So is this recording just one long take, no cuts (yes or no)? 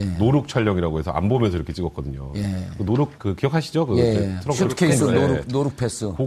no